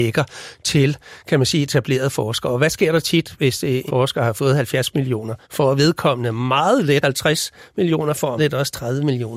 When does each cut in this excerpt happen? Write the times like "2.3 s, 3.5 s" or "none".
3.9 s, 5.4 s, 7.0 s, 8.4 s